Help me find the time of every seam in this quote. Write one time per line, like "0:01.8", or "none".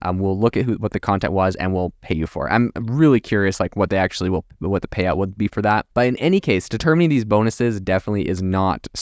0:05.9